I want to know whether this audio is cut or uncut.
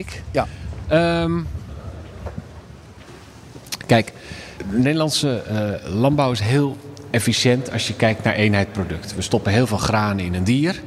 uncut